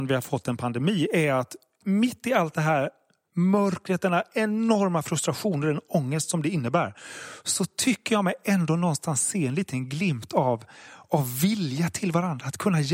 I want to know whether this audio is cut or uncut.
uncut